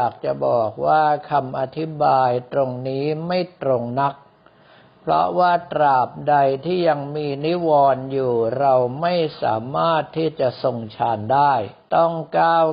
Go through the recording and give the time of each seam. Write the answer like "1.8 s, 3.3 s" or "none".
11.8 s